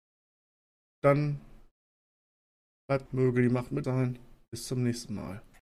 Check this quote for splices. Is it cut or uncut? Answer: cut